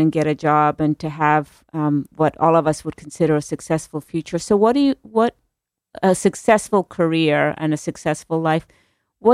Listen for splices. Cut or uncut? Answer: uncut